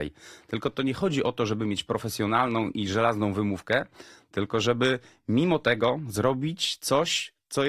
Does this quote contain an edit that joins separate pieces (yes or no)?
no